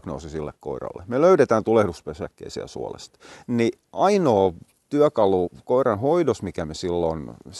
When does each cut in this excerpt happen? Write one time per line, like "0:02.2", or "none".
none